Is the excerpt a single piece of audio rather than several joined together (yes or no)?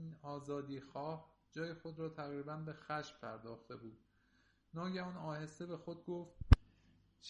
yes